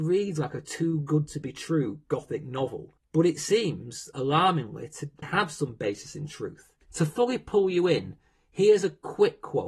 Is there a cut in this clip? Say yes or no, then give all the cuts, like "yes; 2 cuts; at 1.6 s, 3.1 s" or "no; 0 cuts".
yes; 3 cuts; at 3.0 s, 5.2 s, 6.8 s